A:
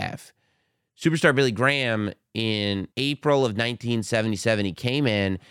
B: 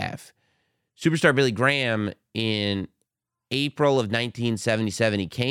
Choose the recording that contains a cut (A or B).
A